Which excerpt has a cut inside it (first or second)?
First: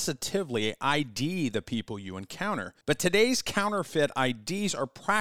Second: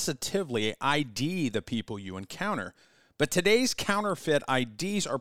first